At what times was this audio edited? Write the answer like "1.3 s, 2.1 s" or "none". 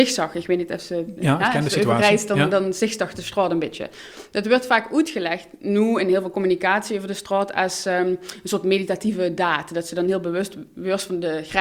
none

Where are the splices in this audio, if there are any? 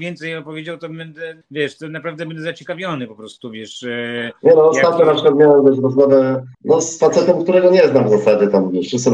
1.4 s, 6.5 s

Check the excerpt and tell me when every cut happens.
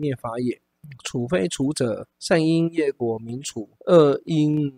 2.1 s, 3.8 s

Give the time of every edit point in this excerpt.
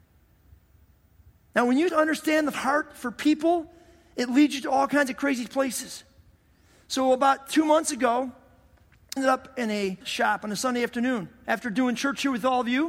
1.9 s, 2.5 s, 9.2 s, 10.0 s

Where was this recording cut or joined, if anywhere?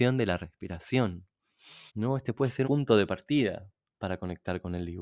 1.9 s, 2.6 s

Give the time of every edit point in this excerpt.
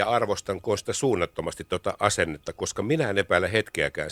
none

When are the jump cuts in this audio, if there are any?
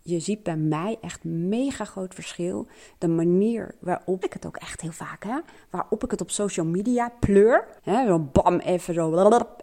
4.2 s, 7.8 s

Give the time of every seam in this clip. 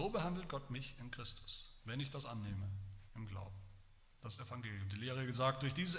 1.8 s, 3.1 s, 4.4 s

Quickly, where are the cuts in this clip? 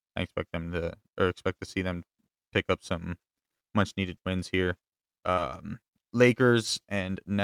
none

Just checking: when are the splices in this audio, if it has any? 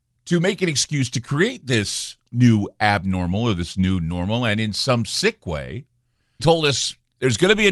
6.4 s

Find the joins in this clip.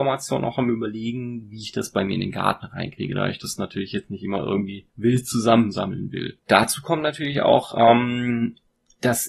4.9 s, 6.4 s

